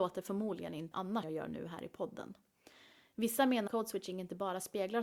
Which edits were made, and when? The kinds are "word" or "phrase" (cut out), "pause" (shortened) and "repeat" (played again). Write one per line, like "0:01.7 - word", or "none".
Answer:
0:00.9 - word
0:01.2 - word
0:03.7 - word